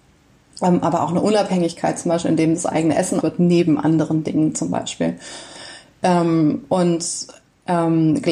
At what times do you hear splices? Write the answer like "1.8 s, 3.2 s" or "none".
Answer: 3.2 s